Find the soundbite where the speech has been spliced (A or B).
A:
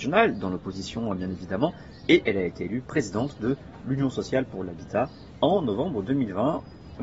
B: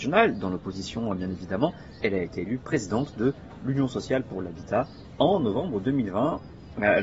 B